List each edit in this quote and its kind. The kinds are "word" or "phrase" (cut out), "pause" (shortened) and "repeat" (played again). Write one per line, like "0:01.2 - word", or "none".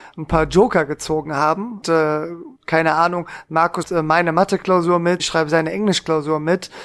0:01.8 - word
0:02.6 - pause
0:03.8 - word
0:05.2 - phrase